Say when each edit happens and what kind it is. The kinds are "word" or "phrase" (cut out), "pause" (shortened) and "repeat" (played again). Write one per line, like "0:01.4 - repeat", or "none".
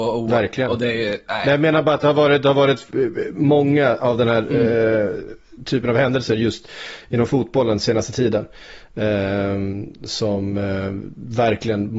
none